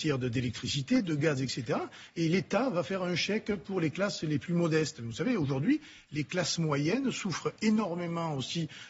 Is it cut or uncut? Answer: uncut